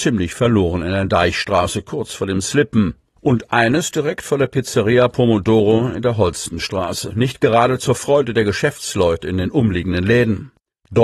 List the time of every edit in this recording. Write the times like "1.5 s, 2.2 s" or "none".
3.0 s